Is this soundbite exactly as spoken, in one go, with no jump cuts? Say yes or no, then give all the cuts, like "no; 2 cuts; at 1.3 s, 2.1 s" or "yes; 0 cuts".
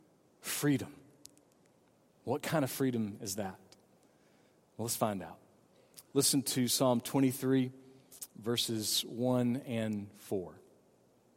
yes; 0 cuts